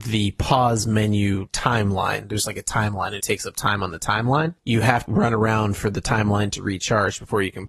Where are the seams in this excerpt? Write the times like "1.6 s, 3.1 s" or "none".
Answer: 3.2 s, 4.6 s, 5.1 s